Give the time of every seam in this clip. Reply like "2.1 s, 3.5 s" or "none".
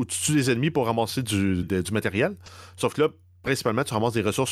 1.6 s